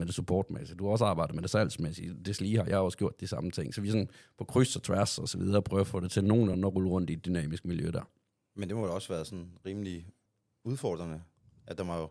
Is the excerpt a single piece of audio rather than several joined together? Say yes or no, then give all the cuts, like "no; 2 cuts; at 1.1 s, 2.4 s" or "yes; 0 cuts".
yes; 0 cuts